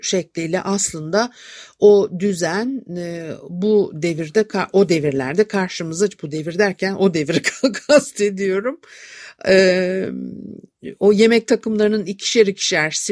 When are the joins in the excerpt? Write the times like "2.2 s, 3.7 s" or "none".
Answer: none